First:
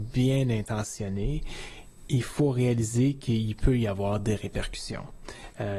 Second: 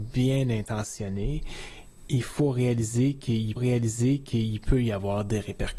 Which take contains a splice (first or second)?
second